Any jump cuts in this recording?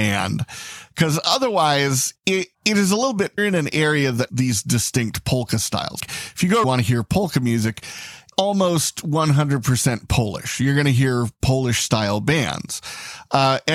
yes; 7 cuts; at 2.2 s, 2.5 s, 3.4 s, 4.3 s, 6.0 s, 6.6 s, 8.3 s

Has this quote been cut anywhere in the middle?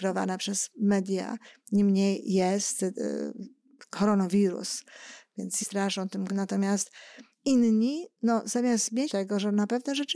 yes; 4 cuts; at 5.6 s, 6.3 s, 7.3 s, 9.1 s

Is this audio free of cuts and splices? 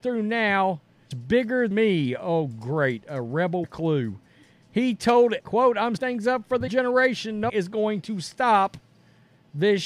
no; 7 cuts; at 1.1 s, 1.7 s, 3.6 s, 5.4 s, 6.0 s, 6.7 s, 7.5 s

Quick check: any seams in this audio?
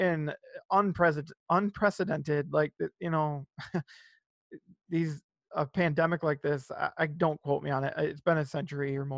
no; 0 cuts

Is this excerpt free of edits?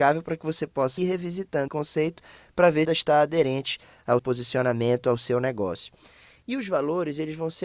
no; 4 cuts; at 1.0 s, 1.7 s, 2.8 s, 4.2 s

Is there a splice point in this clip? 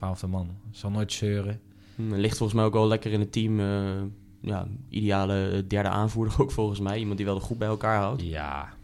no; 0 cuts

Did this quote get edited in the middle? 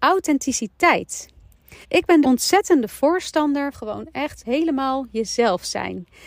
yes; 4 cuts; at 1.8 s, 2.2 s, 3.7 s, 4.4 s

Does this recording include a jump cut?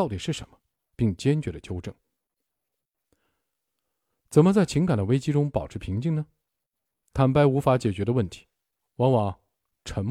no; 0 cuts

